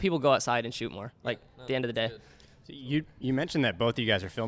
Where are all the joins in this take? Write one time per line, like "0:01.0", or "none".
none